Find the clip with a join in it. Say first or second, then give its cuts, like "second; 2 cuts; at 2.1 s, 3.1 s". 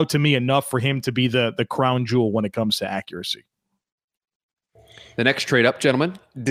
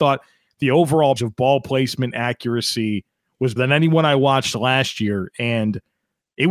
second; 2 cuts; at 1.2 s, 3.6 s